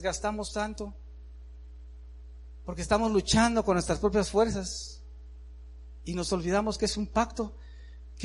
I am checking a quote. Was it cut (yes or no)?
no